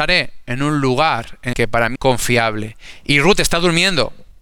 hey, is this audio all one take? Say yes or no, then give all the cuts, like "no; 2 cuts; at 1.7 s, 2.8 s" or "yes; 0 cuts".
no; 2 cuts; at 1.5 s, 1.9 s